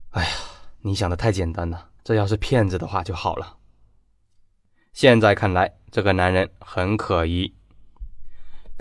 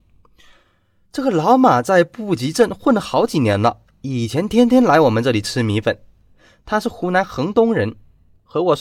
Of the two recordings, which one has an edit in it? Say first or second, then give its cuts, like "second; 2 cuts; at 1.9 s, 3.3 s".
first; 1 cut; at 2.0 s